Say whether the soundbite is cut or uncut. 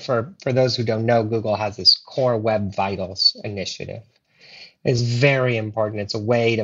uncut